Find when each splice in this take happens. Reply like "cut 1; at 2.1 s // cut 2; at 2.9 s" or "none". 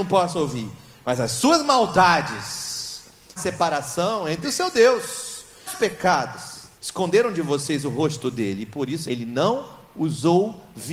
cut 1; at 3.4 s // cut 2; at 4.4 s // cut 3; at 5.7 s // cut 4; at 6.7 s // cut 5; at 9.1 s

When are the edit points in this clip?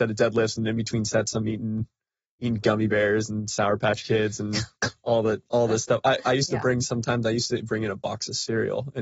none

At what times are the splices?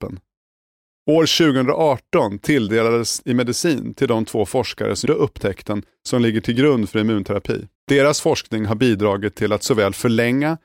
cut 1; at 3.2 s // cut 2; at 5.1 s // cut 3; at 7.8 s

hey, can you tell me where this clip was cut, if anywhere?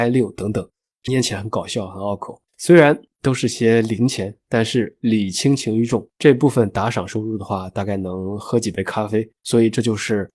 cut 1; at 1.1 s // cut 2; at 2.5 s // cut 3; at 4.4 s // cut 4; at 6.1 s // cut 5; at 9.4 s

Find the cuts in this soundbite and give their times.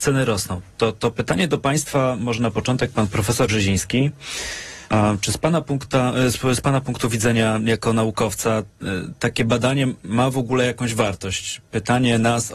cut 1; at 3.5 s // cut 2; at 4.9 s

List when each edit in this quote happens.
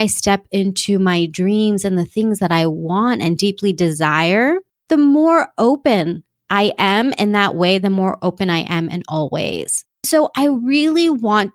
none

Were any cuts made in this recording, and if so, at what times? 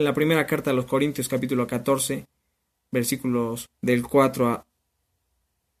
cut 1; at 3.7 s

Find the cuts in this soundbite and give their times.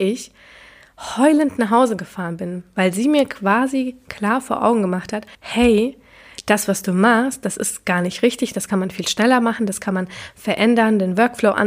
cut 1; at 5.3 s

